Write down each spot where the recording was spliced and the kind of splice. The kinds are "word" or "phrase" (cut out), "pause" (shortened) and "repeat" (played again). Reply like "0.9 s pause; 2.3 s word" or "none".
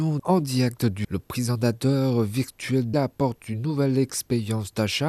1.0 s word; 2.9 s phrase